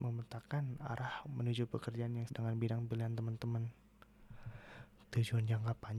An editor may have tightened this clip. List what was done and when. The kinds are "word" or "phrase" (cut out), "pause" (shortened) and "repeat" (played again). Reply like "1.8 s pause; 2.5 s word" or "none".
2.3 s word

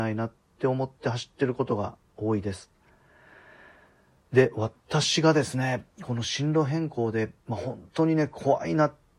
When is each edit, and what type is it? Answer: 7.4 s pause

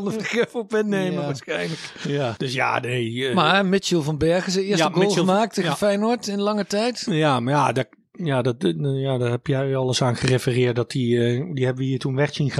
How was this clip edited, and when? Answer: none

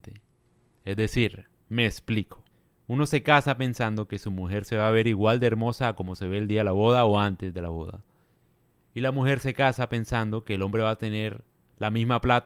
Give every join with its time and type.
2.5 s pause

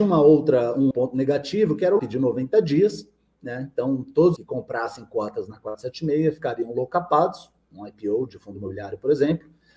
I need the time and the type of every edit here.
0.9 s word; 2.0 s word; 4.4 s phrase

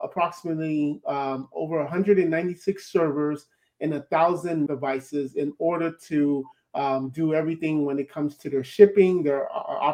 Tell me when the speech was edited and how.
4.7 s word

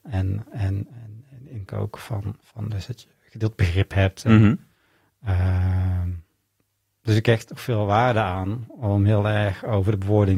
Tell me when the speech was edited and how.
1.7 s word; 7.6 s word

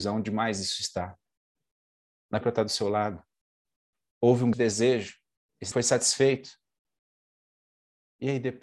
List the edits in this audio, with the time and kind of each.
2.4 s phrase; 3.8 s pause; 4.5 s word; 5.7 s word

